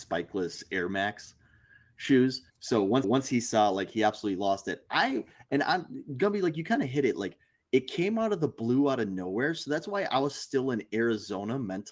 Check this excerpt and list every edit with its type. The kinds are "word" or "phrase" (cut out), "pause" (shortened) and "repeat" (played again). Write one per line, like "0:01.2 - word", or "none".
0:02.5 - pause
0:03.0 - repeat